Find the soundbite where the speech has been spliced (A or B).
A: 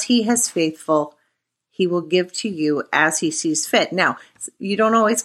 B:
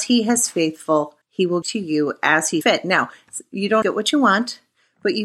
B